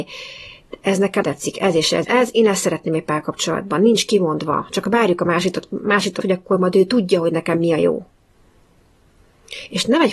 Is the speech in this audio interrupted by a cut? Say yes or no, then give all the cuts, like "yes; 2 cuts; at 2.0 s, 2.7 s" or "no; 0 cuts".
yes; 3 cuts; at 1.2 s, 2.0 s, 6.2 s